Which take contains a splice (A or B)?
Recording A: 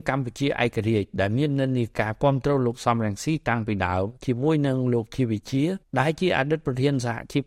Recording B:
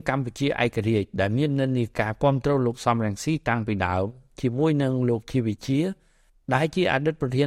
A